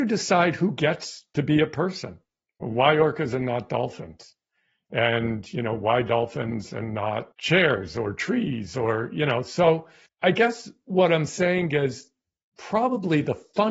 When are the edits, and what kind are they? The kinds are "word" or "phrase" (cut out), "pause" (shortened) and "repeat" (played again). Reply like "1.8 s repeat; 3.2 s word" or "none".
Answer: 7.3 s pause; 10.1 s word